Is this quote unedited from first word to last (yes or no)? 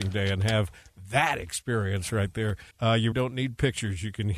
no